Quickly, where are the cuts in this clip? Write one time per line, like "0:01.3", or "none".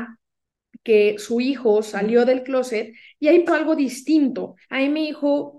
0:03.5
0:04.6